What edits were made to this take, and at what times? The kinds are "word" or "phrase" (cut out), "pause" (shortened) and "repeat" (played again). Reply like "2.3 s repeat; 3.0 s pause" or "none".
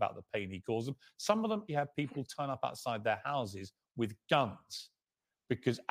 1.7 s word